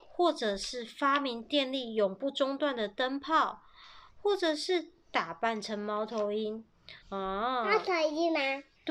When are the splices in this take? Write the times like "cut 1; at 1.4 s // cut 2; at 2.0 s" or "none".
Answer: cut 1; at 7.0 s